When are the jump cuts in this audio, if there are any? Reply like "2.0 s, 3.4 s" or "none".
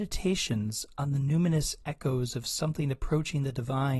none